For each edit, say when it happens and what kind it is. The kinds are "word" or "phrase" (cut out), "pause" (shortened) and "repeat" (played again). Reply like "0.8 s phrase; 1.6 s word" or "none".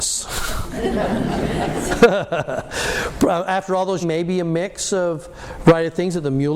4.0 s phrase